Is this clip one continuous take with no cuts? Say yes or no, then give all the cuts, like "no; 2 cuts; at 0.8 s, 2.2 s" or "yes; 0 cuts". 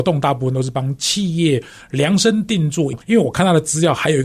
no; 1 cut; at 3.0 s